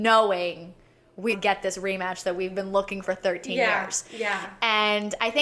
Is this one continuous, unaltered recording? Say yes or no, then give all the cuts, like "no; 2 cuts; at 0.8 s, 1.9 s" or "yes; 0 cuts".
no; 2 cuts; at 1.3 s, 3.0 s